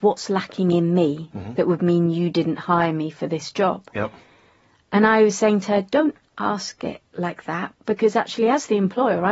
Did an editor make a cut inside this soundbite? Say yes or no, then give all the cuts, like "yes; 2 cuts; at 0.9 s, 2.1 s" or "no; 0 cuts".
no; 0 cuts